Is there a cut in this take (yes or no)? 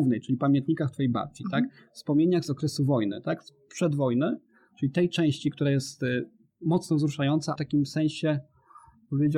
yes